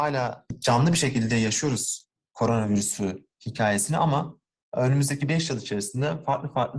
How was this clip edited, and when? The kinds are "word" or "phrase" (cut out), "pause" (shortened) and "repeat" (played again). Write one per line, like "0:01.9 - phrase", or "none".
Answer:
none